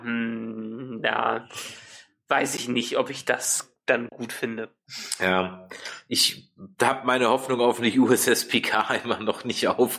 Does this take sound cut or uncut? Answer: uncut